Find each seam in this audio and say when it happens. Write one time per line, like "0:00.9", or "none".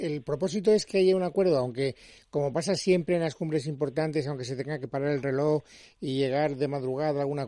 none